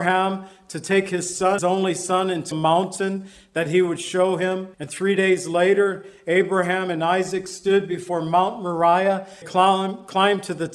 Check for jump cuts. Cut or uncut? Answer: cut